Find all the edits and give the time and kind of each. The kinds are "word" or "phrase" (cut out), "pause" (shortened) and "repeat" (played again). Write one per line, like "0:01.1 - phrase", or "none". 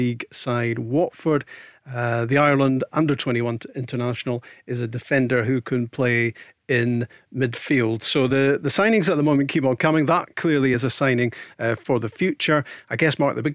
none